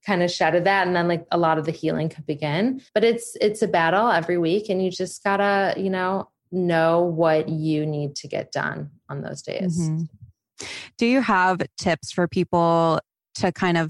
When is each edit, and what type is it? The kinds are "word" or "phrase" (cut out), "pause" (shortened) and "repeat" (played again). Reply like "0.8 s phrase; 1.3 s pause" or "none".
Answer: 2.9 s pause; 6.4 s pause